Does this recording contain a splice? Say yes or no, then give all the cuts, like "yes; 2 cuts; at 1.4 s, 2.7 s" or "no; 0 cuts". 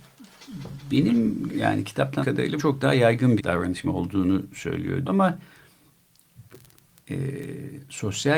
yes; 6 cuts; at 1.5 s, 2.2 s, 2.6 s, 3.4 s, 3.8 s, 5.1 s